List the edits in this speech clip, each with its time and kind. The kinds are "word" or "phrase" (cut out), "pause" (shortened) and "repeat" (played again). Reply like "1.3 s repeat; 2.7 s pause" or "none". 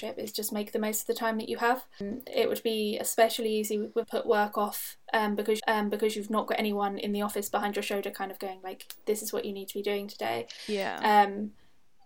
4.0 s phrase; 5.6 s repeat